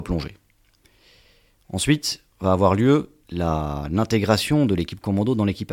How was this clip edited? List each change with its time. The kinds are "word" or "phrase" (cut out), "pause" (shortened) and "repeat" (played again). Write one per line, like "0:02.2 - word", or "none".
0:02.3 - pause
0:03.2 - pause